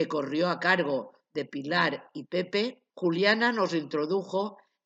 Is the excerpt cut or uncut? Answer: cut